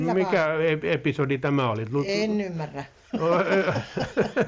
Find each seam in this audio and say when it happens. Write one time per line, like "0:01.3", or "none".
none